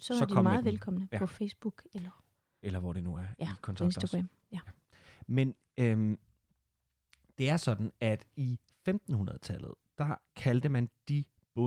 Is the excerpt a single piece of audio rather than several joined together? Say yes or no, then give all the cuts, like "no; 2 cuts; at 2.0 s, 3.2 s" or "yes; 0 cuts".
yes; 0 cuts